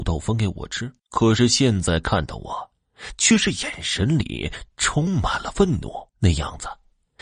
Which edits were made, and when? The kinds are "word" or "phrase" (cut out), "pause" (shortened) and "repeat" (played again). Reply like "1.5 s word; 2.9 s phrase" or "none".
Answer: 1.0 s pause; 6.1 s pause